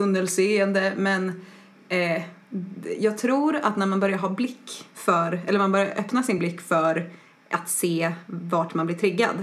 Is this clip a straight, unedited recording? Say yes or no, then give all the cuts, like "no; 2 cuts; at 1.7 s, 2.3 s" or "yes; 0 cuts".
yes; 0 cuts